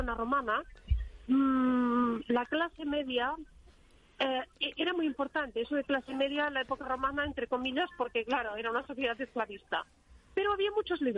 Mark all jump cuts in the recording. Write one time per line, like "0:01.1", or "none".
none

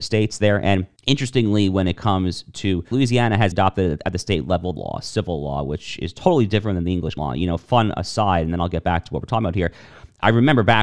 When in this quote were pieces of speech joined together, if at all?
0:01.0
0:02.9
0:03.5
0:04.8
0:07.2

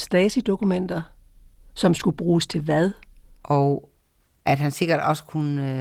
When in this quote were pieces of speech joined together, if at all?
none

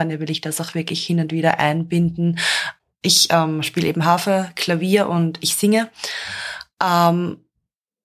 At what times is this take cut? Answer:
none

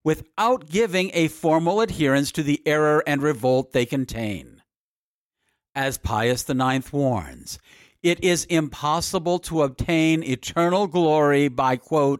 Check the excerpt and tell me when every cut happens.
none

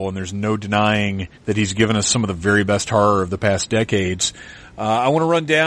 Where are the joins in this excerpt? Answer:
0:01.3

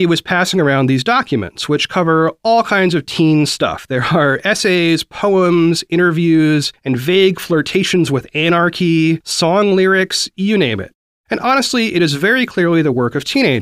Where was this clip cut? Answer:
none

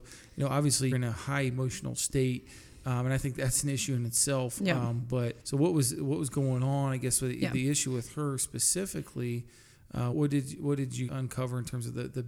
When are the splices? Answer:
0:00.9
0:05.4
0:10.1
0:11.1

